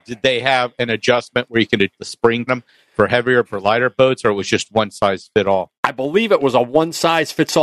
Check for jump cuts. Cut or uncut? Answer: cut